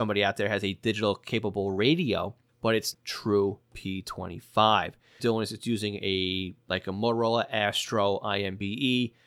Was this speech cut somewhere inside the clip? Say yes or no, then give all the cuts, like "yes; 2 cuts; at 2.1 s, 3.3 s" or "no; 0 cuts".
yes; 3 cuts; at 2.5 s, 2.9 s, 5.2 s